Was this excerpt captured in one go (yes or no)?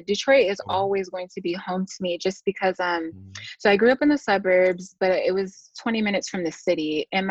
yes